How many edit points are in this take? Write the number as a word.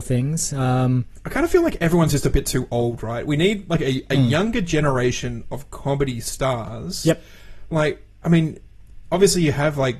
zero